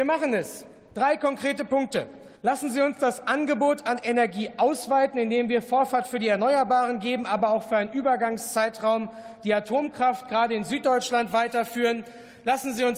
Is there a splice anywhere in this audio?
yes; 1 cut; at 2.4 s

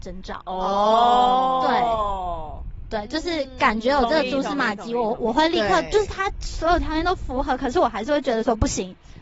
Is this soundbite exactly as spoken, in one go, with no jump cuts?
yes; 0 cuts

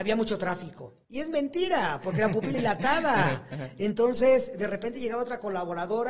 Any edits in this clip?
yes; 1 cut; at 2.5 s

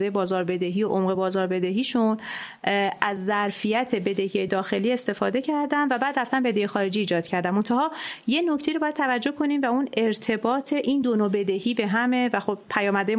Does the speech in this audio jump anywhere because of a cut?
no; 0 cuts

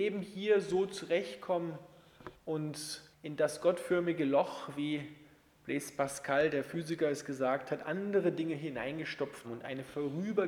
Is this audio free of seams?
no; 2 cuts; at 3.1 s, 9.4 s

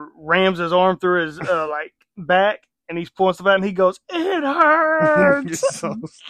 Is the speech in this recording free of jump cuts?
yes; 0 cuts

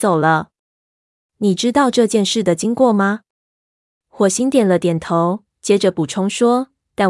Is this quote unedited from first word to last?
yes; 0 cuts

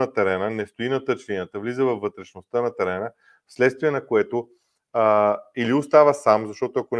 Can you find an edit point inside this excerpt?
no; 0 cuts

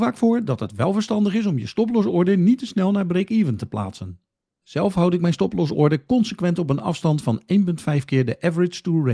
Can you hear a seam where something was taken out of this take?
no; 0 cuts

